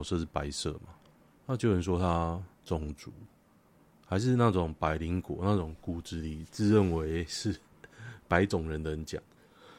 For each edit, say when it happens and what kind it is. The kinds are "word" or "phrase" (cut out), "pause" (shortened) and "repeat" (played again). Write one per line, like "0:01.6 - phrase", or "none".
0:01.2 - pause
0:02.5 - pause
0:03.5 - pause